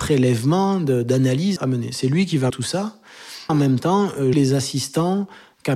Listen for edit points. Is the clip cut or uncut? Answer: cut